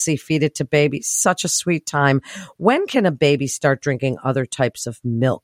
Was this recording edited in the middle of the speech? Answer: no; 0 cuts

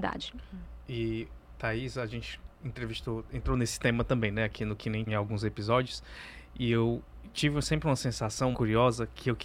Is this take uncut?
no; 2 cuts; at 5.1 s, 8.5 s

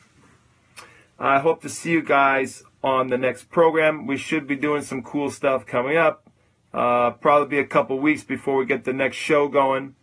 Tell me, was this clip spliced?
no; 0 cuts

